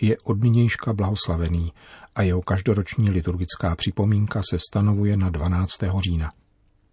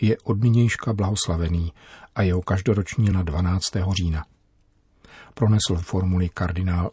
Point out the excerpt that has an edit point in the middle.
second; 2 cuts; at 3.1 s, 5.8 s

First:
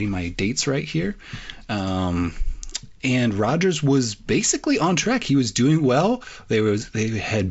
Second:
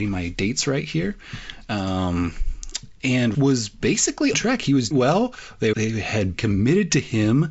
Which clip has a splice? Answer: second; 5 cuts; at 3.3 s, 4.3 s, 4.9 s, 5.7 s, 6.3 s

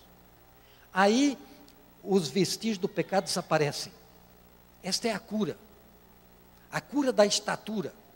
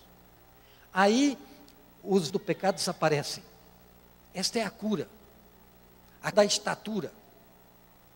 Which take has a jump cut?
second; 2 cuts; at 2.3 s, 6.3 s

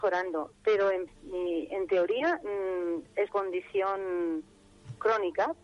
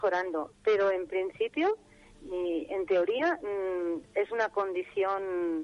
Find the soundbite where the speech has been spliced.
first; 2 cuts; at 1.1 s, 3.3 s

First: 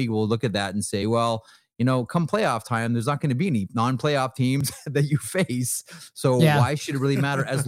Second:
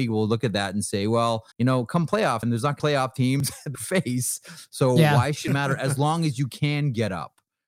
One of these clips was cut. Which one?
second; 5 cuts; at 1.5 s, 2.4 s, 2.8 s, 3.7 s, 5.5 s

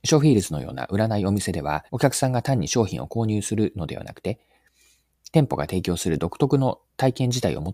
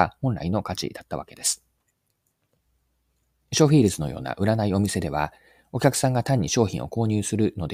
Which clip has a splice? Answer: first; 1 cut; at 1.9 s

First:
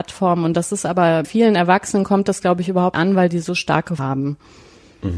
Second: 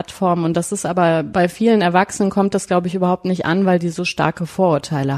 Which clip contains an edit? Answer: first; 3 cuts; at 1.2 s, 2.9 s, 4.0 s

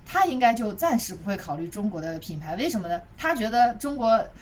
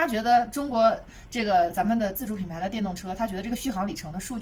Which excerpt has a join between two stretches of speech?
first; 1 cut; at 3.1 s

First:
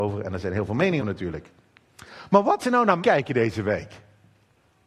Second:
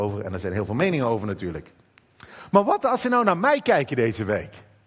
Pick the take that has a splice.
first; 3 cuts; at 1.0 s, 2.6 s, 3.0 s

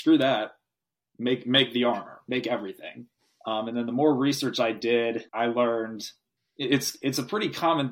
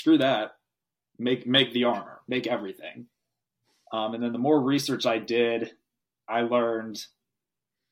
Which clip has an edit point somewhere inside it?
first; 3 cuts; at 3.2 s, 5.3 s, 6.4 s

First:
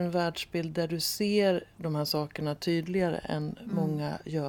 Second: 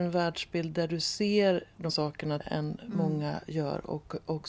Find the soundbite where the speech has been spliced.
second; 2 cuts; at 1.9 s, 2.4 s

